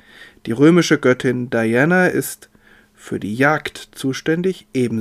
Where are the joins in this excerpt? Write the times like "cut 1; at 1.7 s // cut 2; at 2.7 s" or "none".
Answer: none